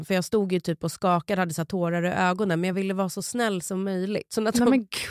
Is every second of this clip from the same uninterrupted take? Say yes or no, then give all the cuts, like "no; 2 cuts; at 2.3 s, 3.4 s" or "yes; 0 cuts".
yes; 0 cuts